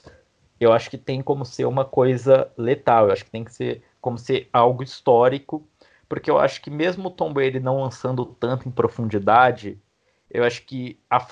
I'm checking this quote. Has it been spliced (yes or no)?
no